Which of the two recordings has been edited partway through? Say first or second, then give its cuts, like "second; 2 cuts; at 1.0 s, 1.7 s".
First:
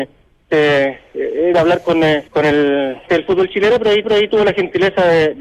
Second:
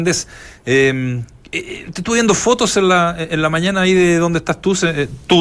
first; 4 cuts; at 1.5 s, 2.3 s, 3.1 s, 4.0 s